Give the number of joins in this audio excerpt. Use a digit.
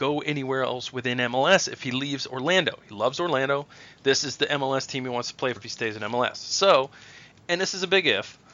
2